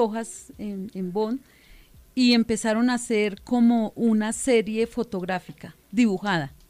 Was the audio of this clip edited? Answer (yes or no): no